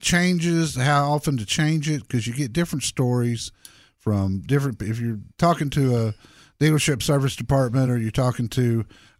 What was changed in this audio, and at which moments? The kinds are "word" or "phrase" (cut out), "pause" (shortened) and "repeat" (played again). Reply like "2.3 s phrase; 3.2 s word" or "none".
none